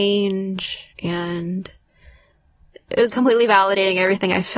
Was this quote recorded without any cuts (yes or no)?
no